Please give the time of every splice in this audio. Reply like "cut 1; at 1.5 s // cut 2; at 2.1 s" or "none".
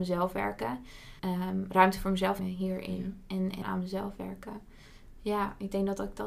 cut 1; at 1.2 s // cut 2; at 2.4 s // cut 3; at 3.6 s